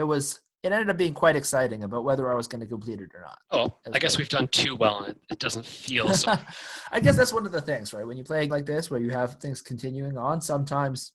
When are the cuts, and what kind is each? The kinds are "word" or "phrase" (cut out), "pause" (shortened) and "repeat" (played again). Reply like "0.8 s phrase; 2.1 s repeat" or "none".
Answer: 3.5 s word; 6.3 s word; 8.5 s word